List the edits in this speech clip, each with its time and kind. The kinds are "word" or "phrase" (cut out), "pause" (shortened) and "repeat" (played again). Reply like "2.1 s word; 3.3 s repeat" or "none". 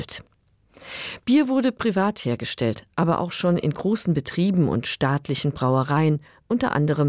none